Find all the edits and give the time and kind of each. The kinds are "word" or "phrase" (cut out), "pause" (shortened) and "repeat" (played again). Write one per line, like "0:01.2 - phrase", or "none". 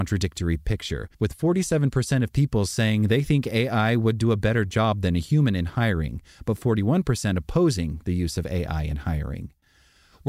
0:01.1 - pause